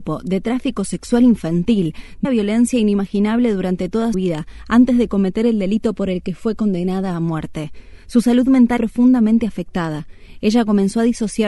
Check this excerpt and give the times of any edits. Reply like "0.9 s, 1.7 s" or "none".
2.2 s, 4.1 s, 8.8 s